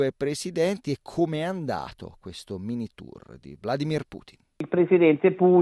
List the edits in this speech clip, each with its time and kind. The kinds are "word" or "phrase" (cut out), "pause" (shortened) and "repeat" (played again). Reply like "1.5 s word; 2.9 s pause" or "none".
none